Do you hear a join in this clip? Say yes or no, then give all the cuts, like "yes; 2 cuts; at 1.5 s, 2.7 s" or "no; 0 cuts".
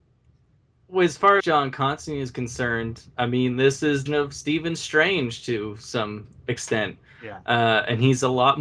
yes; 2 cuts; at 1.4 s, 4.1 s